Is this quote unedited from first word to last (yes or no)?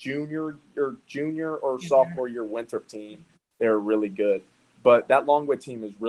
yes